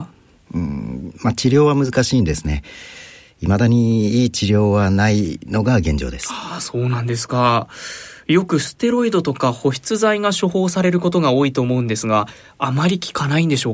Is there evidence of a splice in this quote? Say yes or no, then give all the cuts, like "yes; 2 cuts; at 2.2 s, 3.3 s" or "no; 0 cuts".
no; 0 cuts